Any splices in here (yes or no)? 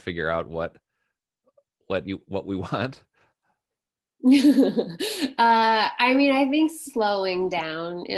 no